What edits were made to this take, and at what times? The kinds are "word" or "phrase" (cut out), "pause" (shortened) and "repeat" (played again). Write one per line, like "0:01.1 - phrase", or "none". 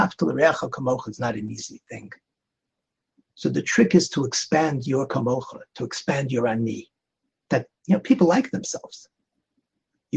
0:07.7 - pause

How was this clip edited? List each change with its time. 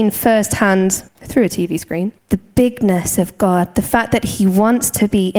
0:01.1 - pause
0:02.2 - pause

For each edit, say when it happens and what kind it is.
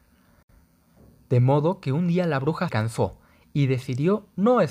0:02.7 - word

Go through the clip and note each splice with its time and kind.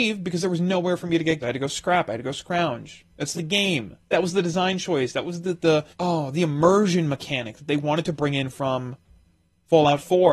0:01.4 - word
0:03.3 - phrase
0:04.0 - pause
0:05.9 - pause

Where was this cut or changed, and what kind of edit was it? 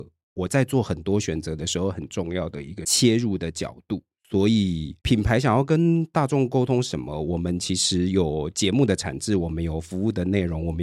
0:05.0 - pause

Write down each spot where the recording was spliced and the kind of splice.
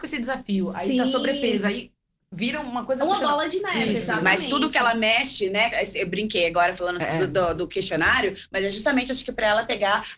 none

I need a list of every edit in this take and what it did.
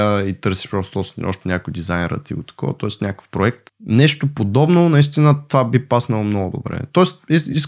0:03.7 - pause

